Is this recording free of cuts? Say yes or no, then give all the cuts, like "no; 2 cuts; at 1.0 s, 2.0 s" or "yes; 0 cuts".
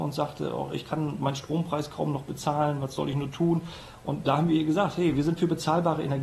yes; 0 cuts